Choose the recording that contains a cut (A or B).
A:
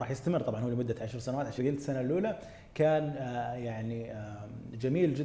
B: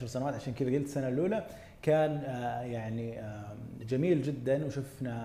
A